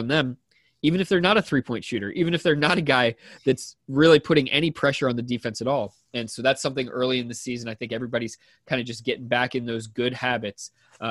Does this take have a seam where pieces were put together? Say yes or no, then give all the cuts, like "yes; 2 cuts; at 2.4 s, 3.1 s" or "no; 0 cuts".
no; 0 cuts